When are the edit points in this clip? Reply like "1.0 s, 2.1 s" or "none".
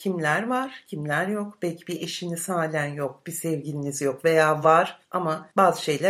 none